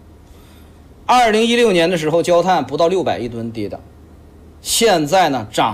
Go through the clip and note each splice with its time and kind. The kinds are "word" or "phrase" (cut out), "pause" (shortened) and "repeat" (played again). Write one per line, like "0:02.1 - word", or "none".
0:04.3 - pause